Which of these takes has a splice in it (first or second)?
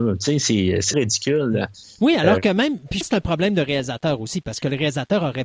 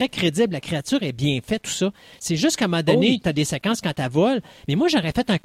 first